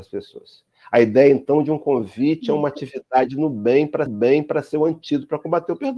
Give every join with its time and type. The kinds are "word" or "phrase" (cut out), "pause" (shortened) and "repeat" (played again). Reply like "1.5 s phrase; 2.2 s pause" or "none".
4.1 s repeat